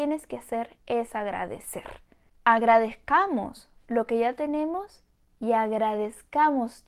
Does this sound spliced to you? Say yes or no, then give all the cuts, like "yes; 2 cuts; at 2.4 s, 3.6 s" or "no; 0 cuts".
no; 0 cuts